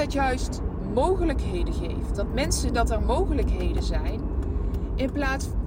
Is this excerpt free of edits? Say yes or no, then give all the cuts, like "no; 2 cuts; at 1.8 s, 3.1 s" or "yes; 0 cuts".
no; 1 cut; at 2.7 s